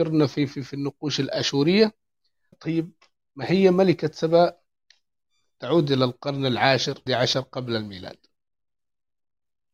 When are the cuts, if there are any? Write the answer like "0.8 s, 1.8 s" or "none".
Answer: 2.5 s, 7.1 s